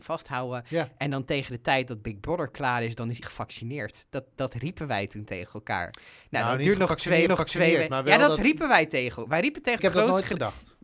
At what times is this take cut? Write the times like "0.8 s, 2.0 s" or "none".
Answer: 3.2 s, 7.3 s, 9.8 s